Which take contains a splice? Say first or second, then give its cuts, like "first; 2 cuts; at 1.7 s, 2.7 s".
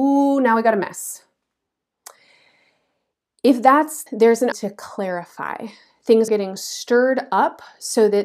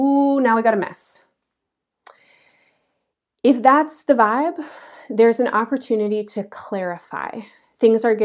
first; 3 cuts; at 4.1 s, 4.5 s, 6.3 s